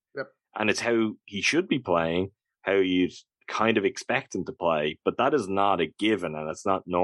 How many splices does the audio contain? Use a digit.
0